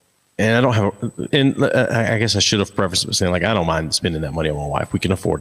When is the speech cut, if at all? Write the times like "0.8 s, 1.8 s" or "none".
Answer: 1.3 s